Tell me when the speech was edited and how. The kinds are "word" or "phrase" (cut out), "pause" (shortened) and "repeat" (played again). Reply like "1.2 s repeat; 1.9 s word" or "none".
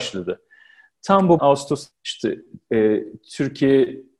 1.4 s word; 1.9 s word